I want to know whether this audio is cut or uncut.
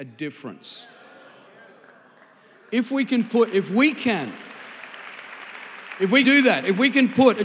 cut